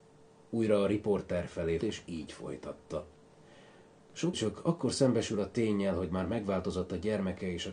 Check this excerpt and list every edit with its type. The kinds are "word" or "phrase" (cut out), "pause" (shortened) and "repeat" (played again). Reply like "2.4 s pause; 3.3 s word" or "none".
1.8 s word; 4.3 s word